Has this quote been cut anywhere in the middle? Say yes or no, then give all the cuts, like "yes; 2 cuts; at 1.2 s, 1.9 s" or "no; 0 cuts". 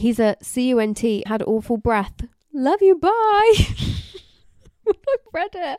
yes; 1 cut; at 1.3 s